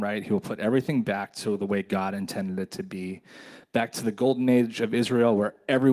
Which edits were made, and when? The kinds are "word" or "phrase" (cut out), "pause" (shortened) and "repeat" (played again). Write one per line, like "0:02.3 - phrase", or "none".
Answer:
none